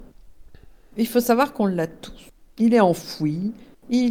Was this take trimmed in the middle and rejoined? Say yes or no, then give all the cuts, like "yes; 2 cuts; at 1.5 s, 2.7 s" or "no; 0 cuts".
no; 0 cuts